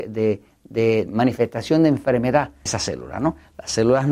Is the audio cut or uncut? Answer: cut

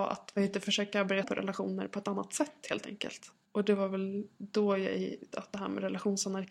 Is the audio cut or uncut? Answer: cut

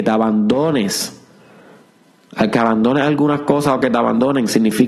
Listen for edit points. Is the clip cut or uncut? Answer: uncut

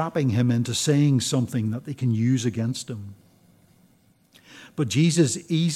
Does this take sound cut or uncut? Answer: uncut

